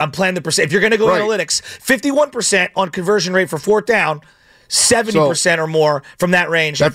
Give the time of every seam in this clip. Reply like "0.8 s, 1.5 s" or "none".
none